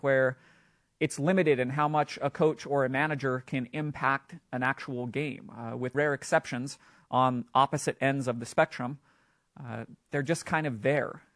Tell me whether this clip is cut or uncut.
cut